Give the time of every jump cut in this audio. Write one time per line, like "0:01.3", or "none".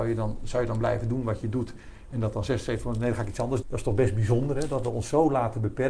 0:03.6